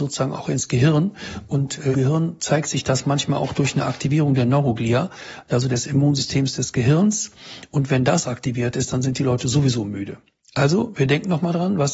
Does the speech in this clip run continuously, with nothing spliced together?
no; 1 cut; at 1.9 s

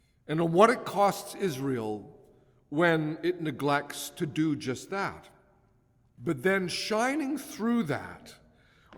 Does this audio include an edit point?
no; 0 cuts

